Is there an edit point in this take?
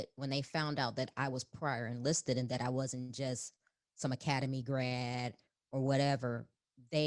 no; 0 cuts

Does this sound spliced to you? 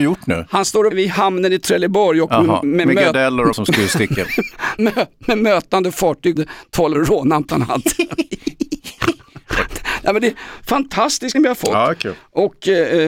yes; 8 cuts; at 0.9 s, 2.6 s, 3.5 s, 4.8 s, 6.4 s, 6.9 s, 7.5 s, 11.3 s

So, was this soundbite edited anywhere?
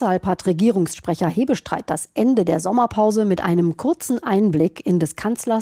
no; 0 cuts

